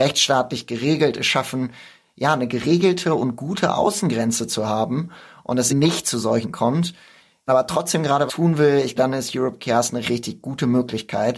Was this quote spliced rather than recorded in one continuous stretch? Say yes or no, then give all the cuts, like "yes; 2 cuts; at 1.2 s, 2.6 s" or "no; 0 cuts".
yes; 6 cuts; at 5.7 s, 6.4 s, 7.5 s, 8.3 s, 9.0 s, 10.0 s